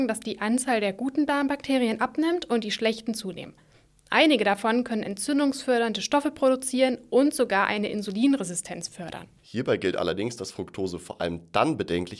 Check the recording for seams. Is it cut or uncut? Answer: cut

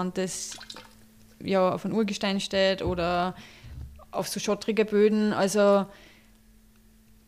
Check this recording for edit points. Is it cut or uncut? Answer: uncut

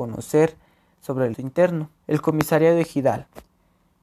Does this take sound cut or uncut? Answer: cut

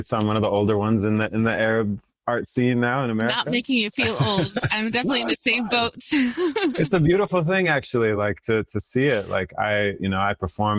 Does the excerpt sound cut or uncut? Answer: uncut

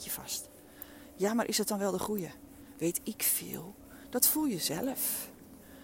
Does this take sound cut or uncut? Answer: uncut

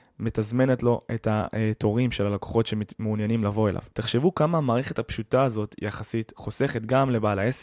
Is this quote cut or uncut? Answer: cut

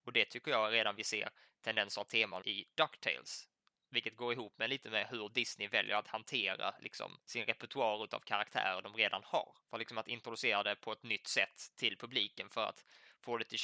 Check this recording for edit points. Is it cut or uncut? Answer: cut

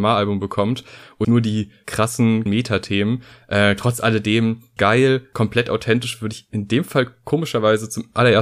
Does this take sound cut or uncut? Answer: cut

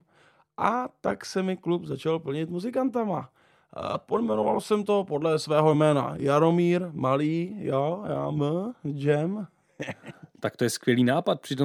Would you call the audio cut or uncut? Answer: uncut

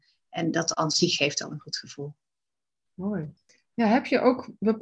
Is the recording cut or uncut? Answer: uncut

